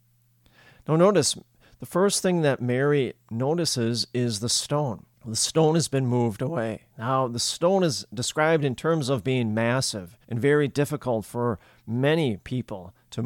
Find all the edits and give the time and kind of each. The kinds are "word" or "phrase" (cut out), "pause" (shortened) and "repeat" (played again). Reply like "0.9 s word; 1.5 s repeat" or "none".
5.1 s pause; 6.9 s pause; 10.2 s pause